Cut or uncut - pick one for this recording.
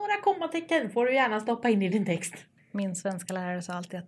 uncut